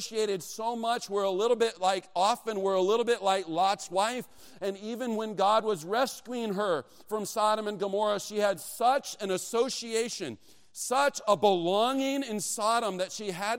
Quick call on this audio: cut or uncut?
uncut